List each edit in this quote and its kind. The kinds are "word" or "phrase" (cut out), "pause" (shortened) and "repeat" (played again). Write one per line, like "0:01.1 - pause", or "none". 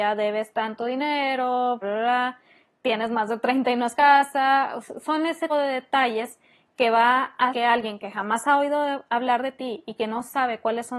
0:01.8 - word
0:03.9 - word
0:05.5 - word
0:07.5 - word